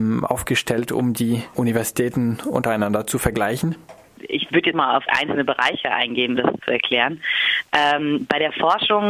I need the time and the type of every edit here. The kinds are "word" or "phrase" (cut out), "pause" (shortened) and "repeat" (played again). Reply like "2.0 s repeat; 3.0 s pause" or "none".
1.5 s word; 4.7 s word; 5.1 s word; 6.4 s word